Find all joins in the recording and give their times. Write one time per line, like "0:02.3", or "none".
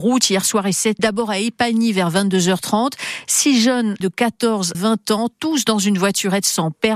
0:01.0
0:04.0
0:04.7